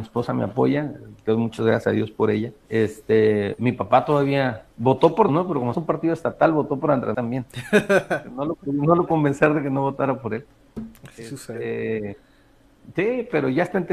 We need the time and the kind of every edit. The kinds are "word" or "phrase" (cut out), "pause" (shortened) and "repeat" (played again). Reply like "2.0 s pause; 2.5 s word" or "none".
2.6 s pause; 4.7 s pause; 5.3 s word; 5.7 s word; 7.1 s word; 9.1 s word

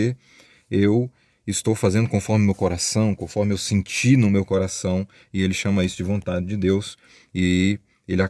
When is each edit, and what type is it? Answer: none

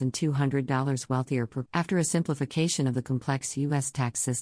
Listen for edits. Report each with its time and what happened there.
1.7 s word

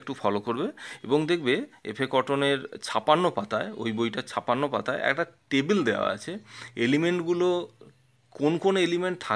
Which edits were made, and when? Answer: none

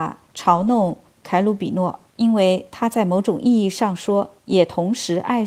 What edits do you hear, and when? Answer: 2.1 s pause; 4.4 s pause

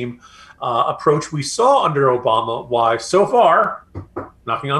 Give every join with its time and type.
none

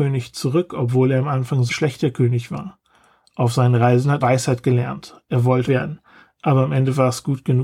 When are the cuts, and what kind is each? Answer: 1.7 s word; 4.2 s word; 5.7 s word

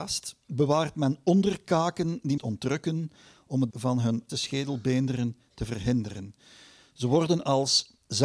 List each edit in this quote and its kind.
2.4 s phrase; 3.7 s word; 4.3 s word

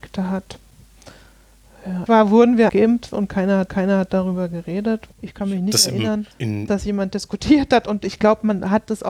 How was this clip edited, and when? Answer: 2.1 s phrase; 2.7 s word; 3.7 s repeat; 5.1 s pause; 6.3 s pause; 6.7 s word

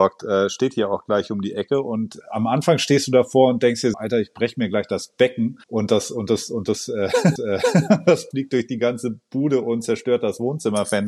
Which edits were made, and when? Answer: 2.2 s word; 3.9 s word; 5.6 s pause; 7.4 s repeat; 8.3 s word

